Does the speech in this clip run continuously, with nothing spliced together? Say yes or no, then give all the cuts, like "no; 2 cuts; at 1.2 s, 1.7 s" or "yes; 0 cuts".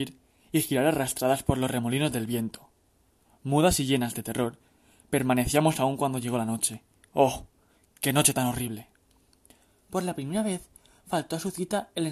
yes; 0 cuts